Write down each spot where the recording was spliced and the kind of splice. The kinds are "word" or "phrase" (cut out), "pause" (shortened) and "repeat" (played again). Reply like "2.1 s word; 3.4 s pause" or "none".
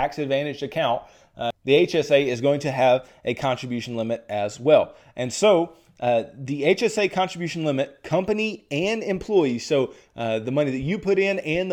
none

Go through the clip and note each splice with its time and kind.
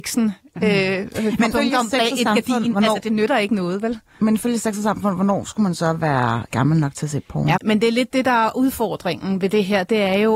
1.5 s word; 6.5 s word; 7.6 s word

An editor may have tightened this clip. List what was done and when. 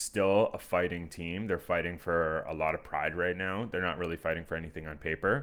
none

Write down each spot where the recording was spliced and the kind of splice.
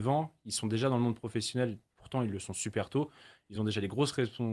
none

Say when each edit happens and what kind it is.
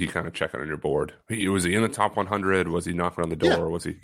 none

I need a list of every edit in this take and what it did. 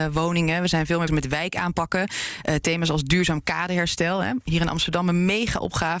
1.1 s word

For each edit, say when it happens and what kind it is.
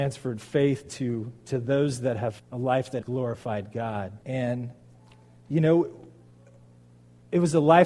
2.4 s word; 3.0 s word; 4.2 s pause

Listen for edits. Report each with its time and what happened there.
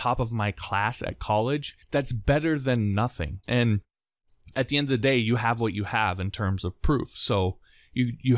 1.8 s pause; 3.4 s pause

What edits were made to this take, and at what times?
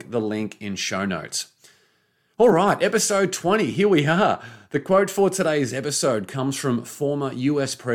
none

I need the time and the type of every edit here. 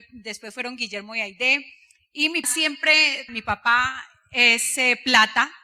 2.4 s word; 3.3 s word

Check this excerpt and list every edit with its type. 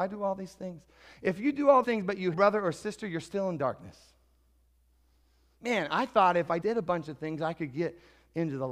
1.8 s word; 2.3 s phrase; 6.6 s word

